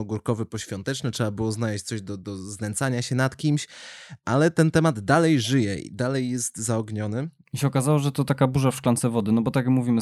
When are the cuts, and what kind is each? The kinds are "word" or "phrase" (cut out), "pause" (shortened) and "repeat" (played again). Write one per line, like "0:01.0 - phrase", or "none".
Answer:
none